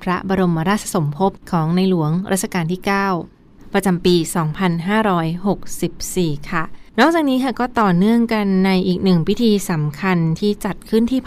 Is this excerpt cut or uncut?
cut